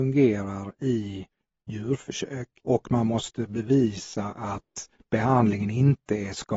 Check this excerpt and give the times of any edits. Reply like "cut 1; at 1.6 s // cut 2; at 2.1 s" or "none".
cut 1; at 2.6 s